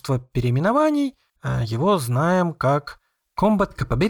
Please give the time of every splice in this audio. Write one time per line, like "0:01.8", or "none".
0:01.3